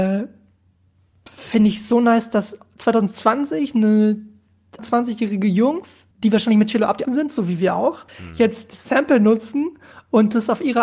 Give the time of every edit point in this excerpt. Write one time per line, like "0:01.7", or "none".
0:04.8
0:06.1
0:07.1
0:08.1